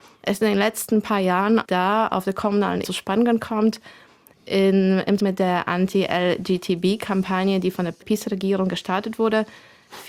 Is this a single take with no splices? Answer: no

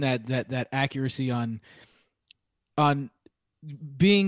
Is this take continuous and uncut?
yes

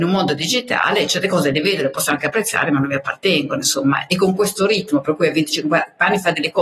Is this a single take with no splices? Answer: yes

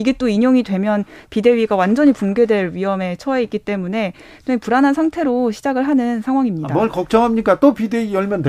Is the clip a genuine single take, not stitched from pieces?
yes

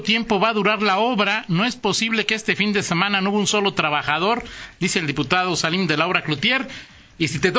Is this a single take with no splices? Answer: yes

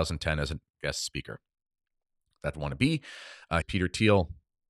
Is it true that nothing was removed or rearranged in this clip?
no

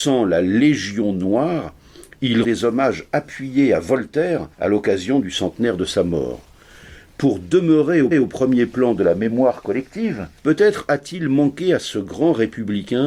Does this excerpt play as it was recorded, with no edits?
no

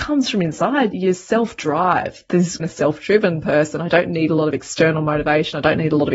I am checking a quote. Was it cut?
yes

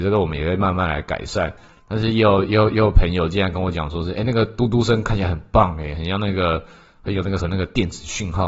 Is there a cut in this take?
yes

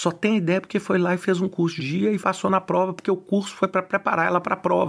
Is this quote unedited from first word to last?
no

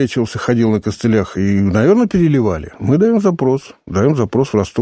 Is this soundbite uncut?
no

